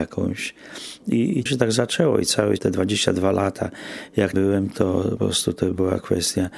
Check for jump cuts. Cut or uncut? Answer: cut